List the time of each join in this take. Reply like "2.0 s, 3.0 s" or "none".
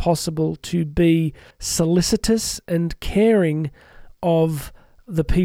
1.5 s